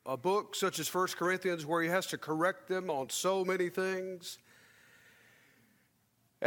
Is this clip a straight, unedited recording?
yes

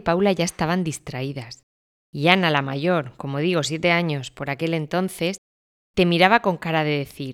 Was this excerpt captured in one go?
yes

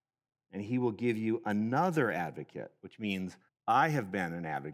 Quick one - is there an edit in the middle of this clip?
yes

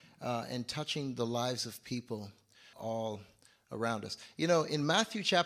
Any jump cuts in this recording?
yes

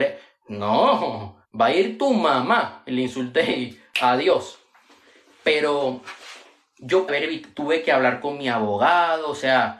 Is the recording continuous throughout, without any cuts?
no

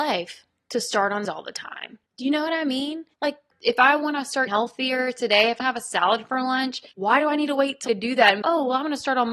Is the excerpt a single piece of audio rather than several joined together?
no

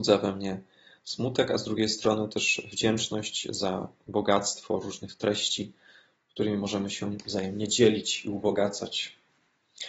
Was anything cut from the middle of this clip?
no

